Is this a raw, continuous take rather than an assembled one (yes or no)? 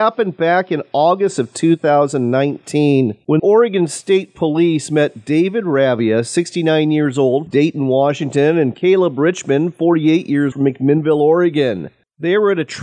no